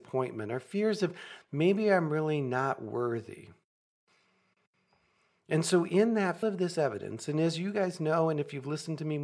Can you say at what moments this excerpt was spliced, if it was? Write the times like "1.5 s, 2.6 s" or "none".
6.4 s